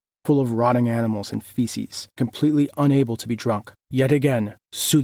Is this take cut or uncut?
cut